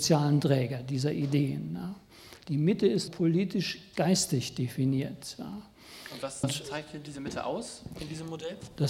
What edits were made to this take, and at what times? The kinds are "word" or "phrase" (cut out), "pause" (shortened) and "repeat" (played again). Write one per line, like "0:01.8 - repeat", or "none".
0:03.1 - word
0:06.4 - word